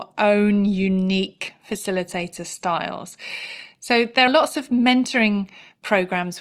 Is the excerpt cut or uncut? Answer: cut